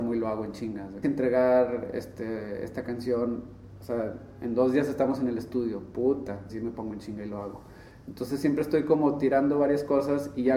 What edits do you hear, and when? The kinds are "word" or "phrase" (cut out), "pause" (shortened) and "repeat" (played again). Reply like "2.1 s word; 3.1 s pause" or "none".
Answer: 1.0 s phrase; 6.5 s word